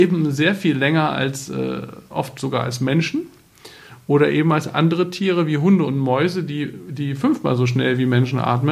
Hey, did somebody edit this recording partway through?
no; 0 cuts

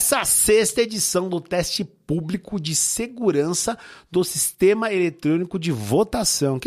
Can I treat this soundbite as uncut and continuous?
yes; 0 cuts

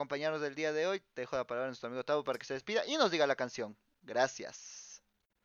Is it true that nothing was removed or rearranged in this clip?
yes; 0 cuts

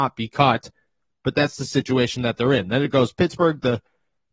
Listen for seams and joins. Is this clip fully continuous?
yes; 0 cuts

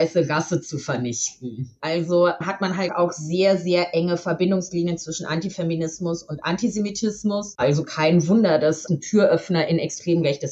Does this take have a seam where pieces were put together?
yes; 2 cuts; at 2.9 s, 8.9 s

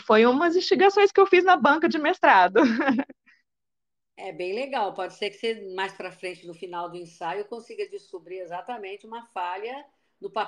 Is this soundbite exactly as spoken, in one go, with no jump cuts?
yes; 0 cuts

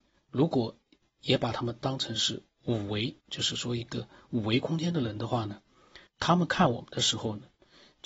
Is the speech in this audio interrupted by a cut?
yes; 2 cuts; at 3.2 s, 6.1 s

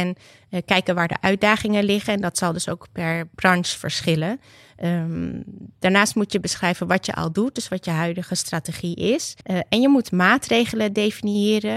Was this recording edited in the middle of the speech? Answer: yes; 2 cuts; at 3.3 s, 9.4 s

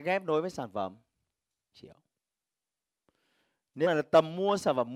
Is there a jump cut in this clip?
yes; 2 cuts; at 1.7 s, 3.8 s

